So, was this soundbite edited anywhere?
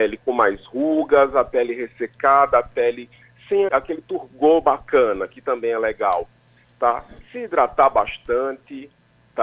yes; 1 cut; at 3.7 s

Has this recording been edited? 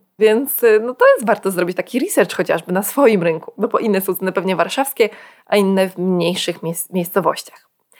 no; 0 cuts

